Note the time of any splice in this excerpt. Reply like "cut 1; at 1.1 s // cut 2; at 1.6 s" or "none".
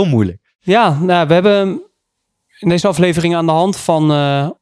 none